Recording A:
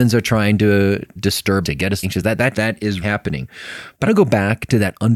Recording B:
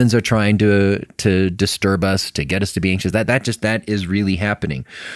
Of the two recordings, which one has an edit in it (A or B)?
A